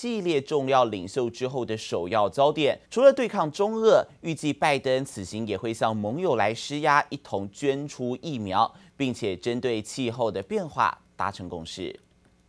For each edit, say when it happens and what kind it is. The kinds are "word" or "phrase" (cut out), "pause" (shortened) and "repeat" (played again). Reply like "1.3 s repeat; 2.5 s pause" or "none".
2.8 s pause